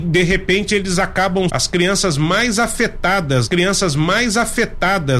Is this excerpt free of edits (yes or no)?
no